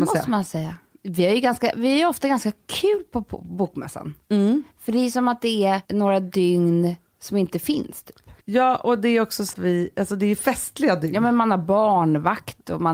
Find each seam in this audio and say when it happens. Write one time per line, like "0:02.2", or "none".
0:05.8
0:08.4
0:09.5